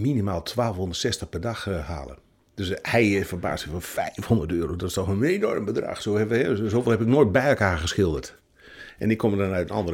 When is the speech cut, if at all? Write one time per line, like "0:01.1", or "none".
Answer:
none